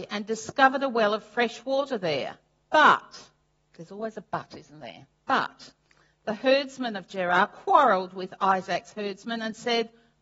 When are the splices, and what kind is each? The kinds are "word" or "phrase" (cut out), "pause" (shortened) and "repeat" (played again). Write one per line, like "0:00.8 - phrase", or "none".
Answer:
0:03.4 - pause
0:05.1 - pause

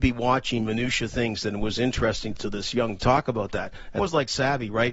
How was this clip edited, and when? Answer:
0:02.4 - word
0:03.0 - word
0:04.0 - word

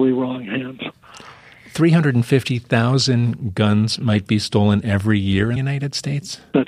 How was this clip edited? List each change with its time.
0:05.6 - word

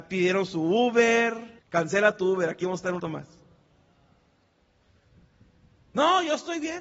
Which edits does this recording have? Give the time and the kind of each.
0:01.6 - pause
0:03.0 - word

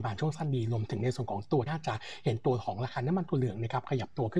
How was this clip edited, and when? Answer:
0:01.7 - word

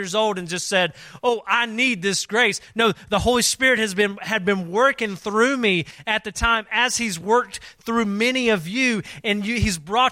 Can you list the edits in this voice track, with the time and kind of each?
none

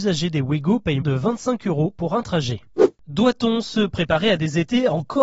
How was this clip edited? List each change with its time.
0:01.0 - word

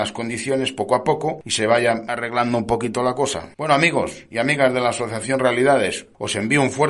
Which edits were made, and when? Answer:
0:03.5 - pause

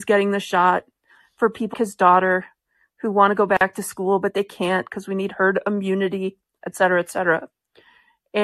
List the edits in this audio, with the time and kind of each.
0:01.7 - word

